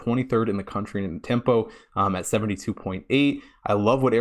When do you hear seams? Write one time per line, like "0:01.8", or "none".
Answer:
0:01.2

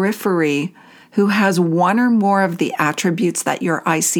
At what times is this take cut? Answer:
none

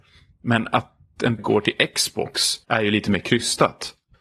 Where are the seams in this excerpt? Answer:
0:01.4
0:02.6

